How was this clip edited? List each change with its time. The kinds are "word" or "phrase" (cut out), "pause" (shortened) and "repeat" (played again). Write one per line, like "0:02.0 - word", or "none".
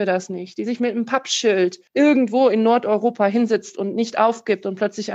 0:01.9 - pause

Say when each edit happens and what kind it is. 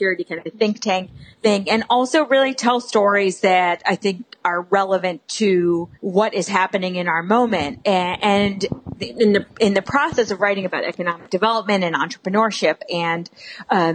0:01.3 - pause
0:05.9 - pause

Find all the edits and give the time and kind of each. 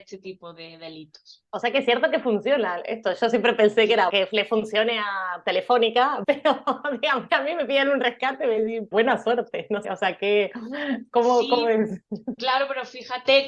0:04.1 - word
0:06.2 - word
0:07.3 - word
0:08.9 - word
0:09.8 - word

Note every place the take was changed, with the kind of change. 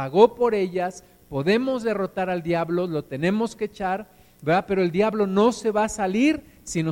none

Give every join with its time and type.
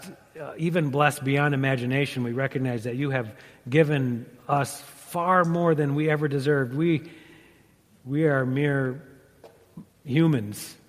none

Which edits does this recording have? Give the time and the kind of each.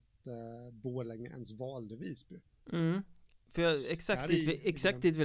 0:02.6 - pause

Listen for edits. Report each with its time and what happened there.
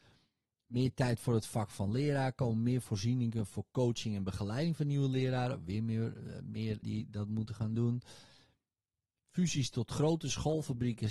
0:06.8 - word

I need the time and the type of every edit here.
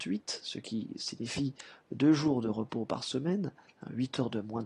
none

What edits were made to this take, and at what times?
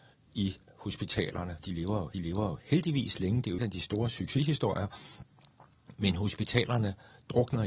0:01.6 - word
0:02.1 - repeat
0:03.6 - word

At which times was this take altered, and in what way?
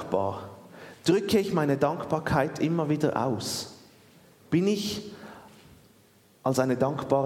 none

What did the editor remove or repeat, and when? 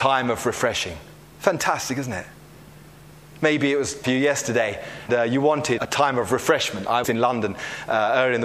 0:01.1 - pause
0:04.0 - phrase
0:05.1 - word
0:05.8 - word
0:07.0 - phrase

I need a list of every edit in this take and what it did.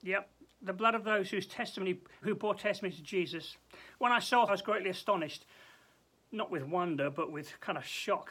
0:02.2 - word
0:04.5 - word

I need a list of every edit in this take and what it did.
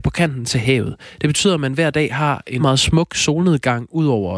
0:02.6 - word

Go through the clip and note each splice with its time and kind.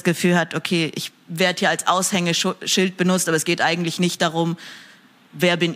none

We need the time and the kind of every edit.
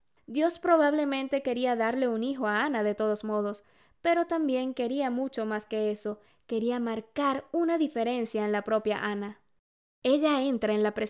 none

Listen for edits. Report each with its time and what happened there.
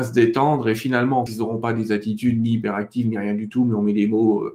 0:01.3 - phrase

